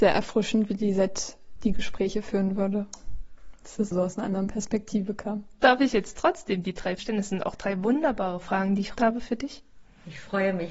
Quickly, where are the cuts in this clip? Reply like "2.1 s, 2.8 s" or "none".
3.9 s, 7.0 s, 9.0 s